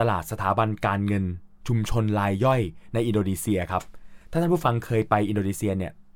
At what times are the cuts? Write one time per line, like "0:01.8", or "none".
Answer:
0:04.2